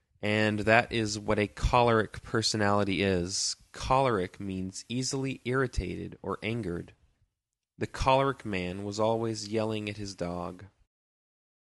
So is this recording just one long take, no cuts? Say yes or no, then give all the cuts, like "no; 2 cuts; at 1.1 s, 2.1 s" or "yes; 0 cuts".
yes; 0 cuts